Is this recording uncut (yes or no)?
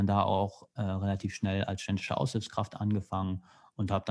yes